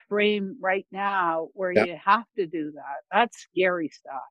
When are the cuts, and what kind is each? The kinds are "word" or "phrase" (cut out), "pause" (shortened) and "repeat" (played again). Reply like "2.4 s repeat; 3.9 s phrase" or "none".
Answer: none